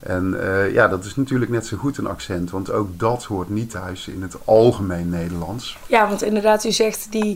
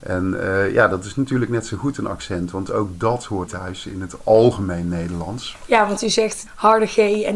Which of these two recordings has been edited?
second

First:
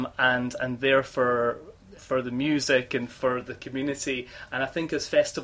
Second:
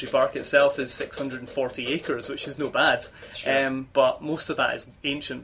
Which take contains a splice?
first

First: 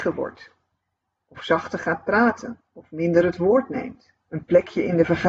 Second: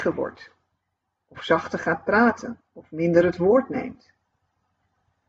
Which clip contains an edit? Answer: first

